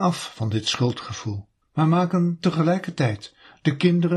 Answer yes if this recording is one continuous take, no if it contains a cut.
no